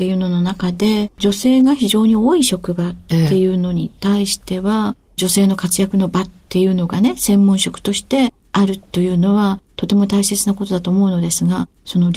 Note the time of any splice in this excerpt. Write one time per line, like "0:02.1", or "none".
0:01.1
0:04.0